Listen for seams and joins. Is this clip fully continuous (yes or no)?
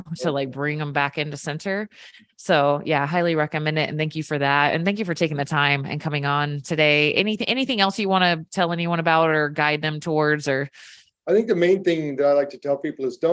yes